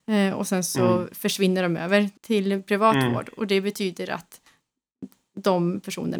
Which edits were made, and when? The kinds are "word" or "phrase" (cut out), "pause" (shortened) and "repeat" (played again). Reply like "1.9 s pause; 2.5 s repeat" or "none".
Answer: 2.2 s pause